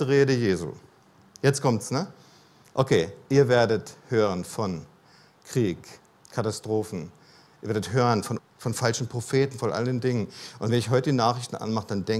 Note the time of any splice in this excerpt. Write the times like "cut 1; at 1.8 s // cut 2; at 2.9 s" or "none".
cut 1; at 8.4 s